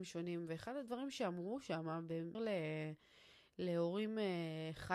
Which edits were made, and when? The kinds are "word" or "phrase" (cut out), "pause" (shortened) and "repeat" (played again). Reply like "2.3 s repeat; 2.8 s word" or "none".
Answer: 2.3 s word